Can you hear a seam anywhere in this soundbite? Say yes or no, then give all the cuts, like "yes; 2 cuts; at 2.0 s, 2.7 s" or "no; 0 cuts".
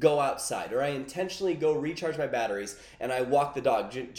no; 0 cuts